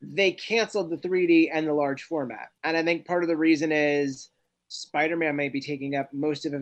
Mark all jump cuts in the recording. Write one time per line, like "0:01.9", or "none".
none